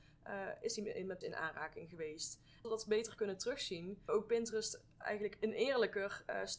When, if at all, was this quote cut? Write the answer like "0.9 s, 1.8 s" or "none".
1.2 s, 2.6 s, 4.1 s